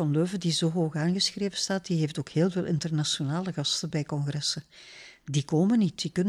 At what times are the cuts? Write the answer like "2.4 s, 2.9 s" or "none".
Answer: none